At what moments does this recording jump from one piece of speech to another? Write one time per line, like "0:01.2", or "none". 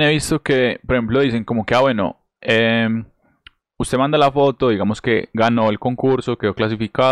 none